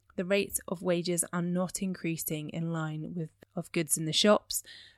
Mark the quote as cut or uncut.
cut